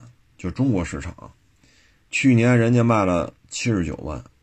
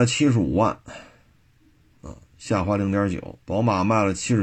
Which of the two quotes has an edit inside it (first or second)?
second